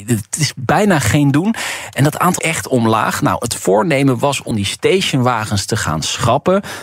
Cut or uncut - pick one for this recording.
cut